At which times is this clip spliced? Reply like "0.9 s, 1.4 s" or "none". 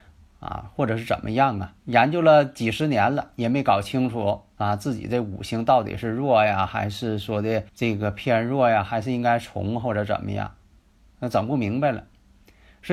1.8 s, 7.7 s